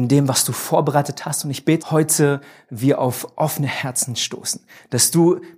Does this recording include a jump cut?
yes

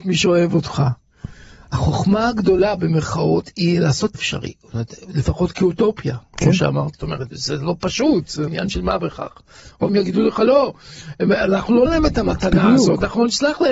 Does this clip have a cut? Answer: yes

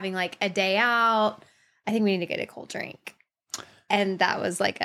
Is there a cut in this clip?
no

